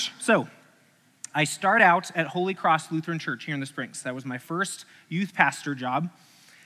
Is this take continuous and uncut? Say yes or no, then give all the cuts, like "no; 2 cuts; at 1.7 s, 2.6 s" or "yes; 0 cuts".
yes; 0 cuts